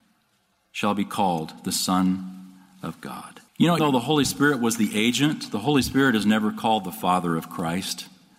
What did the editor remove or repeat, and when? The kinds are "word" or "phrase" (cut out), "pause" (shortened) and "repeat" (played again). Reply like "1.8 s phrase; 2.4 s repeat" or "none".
3.5 s pause; 3.8 s word